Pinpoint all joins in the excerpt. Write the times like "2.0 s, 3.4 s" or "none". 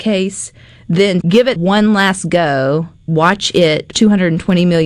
1.2 s, 1.6 s, 3.1 s, 3.9 s